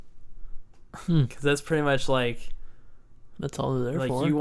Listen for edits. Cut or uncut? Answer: uncut